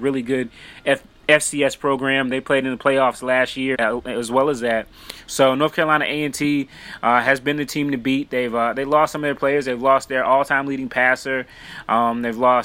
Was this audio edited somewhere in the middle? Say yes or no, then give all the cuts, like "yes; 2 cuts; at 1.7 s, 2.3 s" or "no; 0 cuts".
yes; 1 cut; at 3.7 s